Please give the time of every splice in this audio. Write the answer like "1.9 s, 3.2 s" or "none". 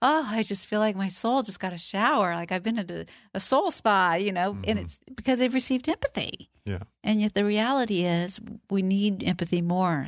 none